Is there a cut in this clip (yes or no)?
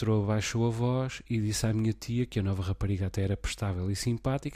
no